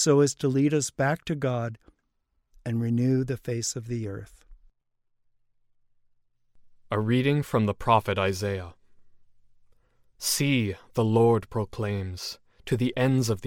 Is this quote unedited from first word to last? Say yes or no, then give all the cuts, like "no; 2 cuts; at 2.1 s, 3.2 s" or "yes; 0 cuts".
yes; 0 cuts